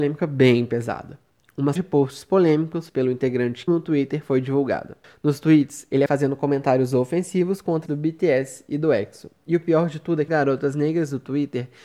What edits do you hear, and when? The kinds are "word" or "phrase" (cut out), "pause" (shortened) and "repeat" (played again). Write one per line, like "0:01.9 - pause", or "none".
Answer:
0:01.8 - word
0:02.9 - word
0:03.7 - word
0:06.1 - word
0:07.9 - word
0:10.3 - word